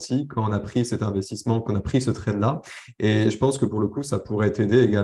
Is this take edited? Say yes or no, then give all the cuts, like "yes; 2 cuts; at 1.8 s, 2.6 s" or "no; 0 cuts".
no; 0 cuts